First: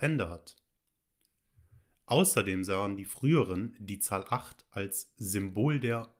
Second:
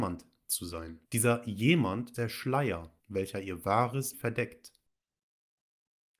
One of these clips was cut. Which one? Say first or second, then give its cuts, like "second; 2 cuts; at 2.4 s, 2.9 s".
second; 4 cuts; at 1.0 s, 2.1 s, 3.0 s, 4.1 s